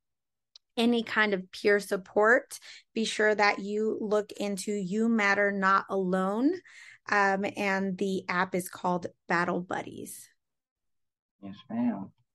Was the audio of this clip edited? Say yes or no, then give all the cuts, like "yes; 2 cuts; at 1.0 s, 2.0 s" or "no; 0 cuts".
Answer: no; 0 cuts